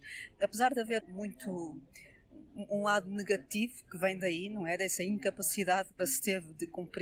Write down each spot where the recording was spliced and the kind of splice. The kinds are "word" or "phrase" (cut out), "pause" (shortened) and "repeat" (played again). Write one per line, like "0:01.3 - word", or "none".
0:01.0 - word
0:02.5 - pause
0:06.0 - phrase